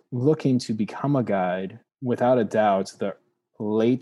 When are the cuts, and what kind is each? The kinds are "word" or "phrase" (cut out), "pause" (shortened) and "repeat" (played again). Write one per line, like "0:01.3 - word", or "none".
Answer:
none